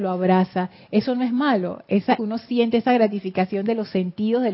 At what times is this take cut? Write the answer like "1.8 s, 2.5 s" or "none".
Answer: 2.2 s